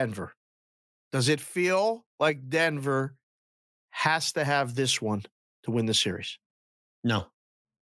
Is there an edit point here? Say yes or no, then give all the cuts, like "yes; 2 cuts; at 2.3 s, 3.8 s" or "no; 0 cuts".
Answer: no; 0 cuts